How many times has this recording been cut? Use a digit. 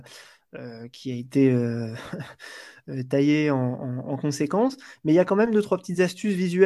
0